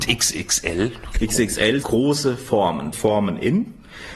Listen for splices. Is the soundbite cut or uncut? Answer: cut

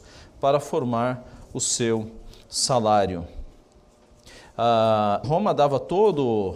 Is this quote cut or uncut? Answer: cut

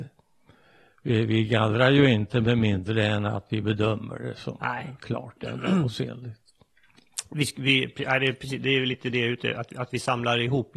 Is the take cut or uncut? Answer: uncut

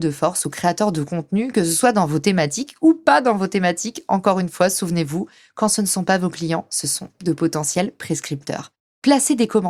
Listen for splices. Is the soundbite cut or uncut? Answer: uncut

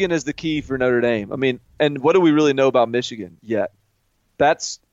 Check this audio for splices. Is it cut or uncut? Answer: cut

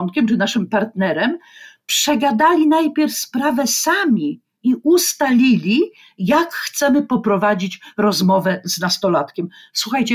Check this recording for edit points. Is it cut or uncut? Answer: uncut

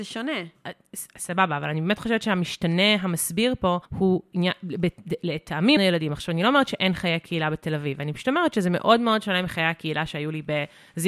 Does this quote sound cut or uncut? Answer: cut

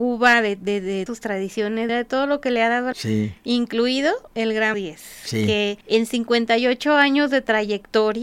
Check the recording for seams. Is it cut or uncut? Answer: cut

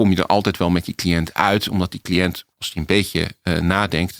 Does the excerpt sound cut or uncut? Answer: cut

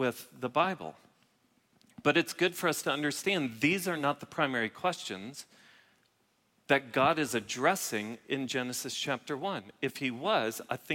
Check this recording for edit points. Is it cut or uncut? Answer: uncut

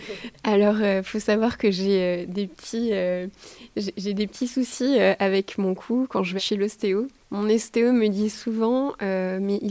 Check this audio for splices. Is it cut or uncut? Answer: uncut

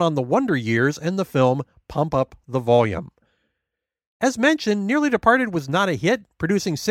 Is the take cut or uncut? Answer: uncut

